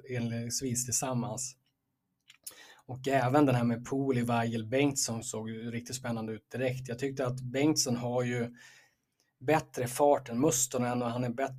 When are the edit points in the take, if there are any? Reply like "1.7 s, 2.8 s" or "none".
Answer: none